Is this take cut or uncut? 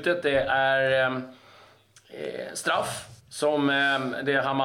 cut